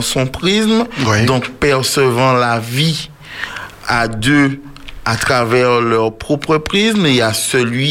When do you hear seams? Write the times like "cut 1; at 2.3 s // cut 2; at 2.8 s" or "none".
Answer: none